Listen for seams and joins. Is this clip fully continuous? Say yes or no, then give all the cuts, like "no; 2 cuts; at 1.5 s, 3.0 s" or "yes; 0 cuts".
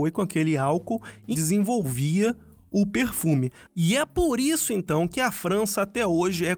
no; 1 cut; at 1.3 s